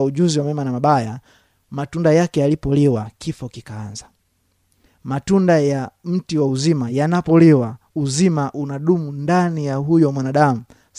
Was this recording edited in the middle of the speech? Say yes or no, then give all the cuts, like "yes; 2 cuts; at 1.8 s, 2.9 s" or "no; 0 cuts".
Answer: no; 0 cuts